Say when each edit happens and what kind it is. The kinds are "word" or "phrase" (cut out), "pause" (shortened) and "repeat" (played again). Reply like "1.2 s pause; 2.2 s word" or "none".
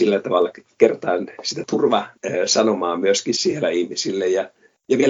1.3 s pause